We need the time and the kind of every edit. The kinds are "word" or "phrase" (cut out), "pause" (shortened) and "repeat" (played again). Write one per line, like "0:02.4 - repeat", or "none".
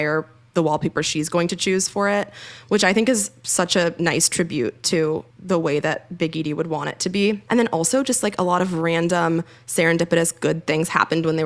0:05.3 - pause